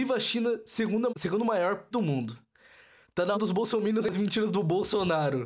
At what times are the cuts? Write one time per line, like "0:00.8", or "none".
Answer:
0:01.1
0:01.9
0:03.3
0:04.0